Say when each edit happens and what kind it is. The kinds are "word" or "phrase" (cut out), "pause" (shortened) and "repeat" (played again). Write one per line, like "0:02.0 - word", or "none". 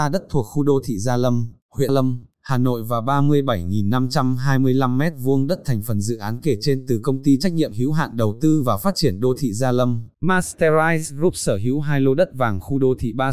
0:01.9 - word
0:10.1 - pause